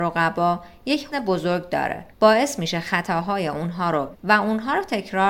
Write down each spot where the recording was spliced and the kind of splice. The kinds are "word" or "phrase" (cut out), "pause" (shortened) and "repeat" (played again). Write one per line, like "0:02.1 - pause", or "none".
0:01.1 - word
0:02.1 - pause
0:04.1 - word